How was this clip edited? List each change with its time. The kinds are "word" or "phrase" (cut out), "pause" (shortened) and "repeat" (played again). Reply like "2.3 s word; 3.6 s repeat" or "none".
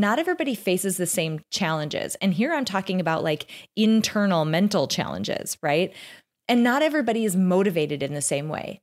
none